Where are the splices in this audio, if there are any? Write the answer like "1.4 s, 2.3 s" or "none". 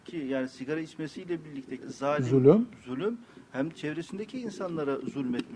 1.8 s, 3.7 s